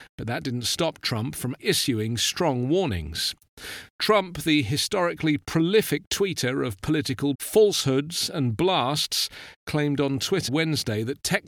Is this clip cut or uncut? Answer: cut